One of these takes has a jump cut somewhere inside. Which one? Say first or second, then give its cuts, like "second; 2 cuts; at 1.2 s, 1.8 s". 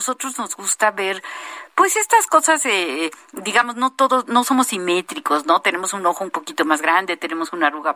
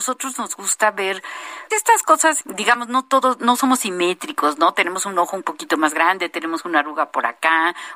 second; 2 cuts; at 1.7 s, 2.4 s